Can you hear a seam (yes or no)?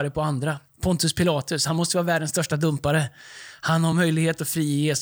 no